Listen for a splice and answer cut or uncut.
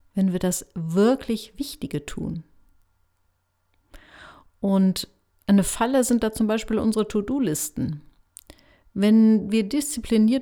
uncut